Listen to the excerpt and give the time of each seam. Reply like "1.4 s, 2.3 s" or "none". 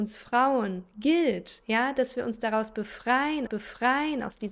3.5 s